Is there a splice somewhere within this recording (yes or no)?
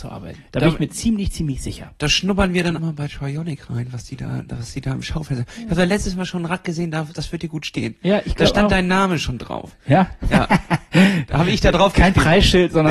yes